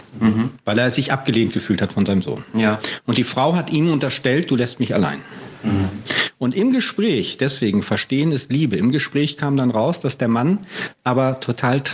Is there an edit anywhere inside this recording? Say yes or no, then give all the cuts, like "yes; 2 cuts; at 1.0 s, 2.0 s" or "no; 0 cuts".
no; 0 cuts